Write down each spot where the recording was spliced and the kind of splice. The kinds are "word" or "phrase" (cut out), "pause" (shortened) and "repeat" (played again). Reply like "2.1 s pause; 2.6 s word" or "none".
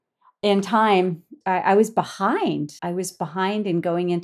1.4 s phrase; 2.8 s pause